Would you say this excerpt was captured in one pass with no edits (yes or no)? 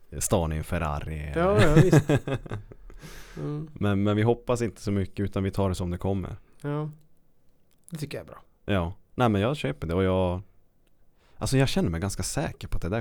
yes